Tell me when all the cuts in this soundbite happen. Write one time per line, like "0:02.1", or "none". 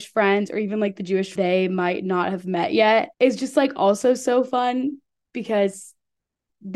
0:01.4
0:03.1